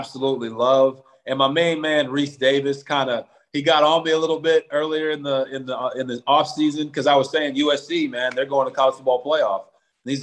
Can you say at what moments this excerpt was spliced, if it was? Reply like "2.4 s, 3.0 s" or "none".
none